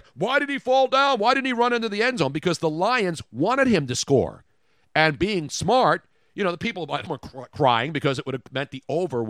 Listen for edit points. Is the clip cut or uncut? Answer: cut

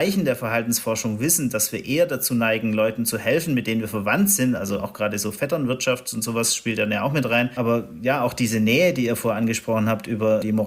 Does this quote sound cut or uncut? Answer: uncut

